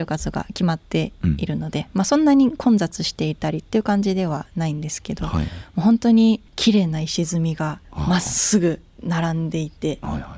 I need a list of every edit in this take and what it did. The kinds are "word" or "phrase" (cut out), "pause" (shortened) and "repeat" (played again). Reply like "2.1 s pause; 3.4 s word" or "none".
6.5 s pause; 7.8 s pause